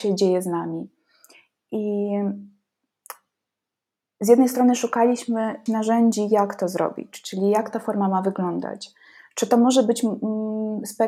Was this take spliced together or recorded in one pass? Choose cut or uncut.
cut